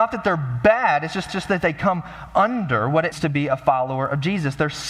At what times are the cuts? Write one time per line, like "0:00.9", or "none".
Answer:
0:01.3
0:03.1